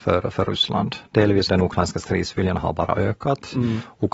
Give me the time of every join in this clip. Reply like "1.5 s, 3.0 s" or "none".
1.5 s